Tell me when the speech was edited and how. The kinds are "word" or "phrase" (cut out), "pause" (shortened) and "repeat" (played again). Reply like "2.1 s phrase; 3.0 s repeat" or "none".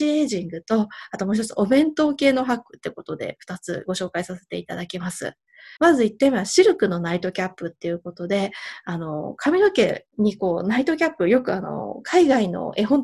5.8 s pause